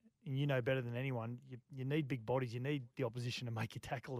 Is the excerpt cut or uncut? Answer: cut